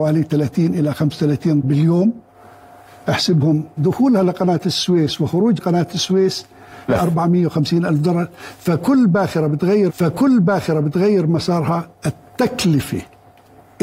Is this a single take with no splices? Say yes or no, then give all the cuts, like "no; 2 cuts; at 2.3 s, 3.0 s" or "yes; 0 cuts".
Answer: no; 5 cuts; at 1.6 s, 3.8 s, 5.6 s, 6.9 s, 9.9 s